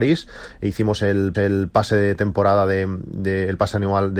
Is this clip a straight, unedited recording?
no; 1 cut; at 1.3 s

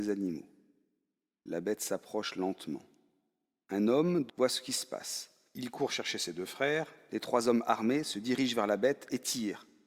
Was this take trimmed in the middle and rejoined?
yes; 1 cut; at 4.3 s

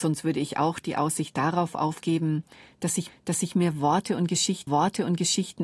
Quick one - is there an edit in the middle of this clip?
yes; 2 cuts; at 3.1 s, 4.7 s

